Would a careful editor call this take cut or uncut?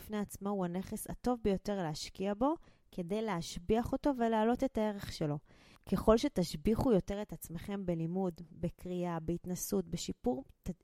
uncut